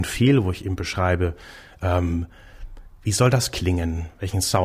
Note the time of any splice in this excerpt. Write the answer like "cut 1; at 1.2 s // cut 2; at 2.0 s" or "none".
none